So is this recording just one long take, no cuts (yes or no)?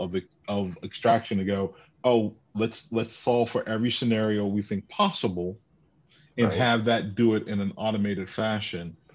yes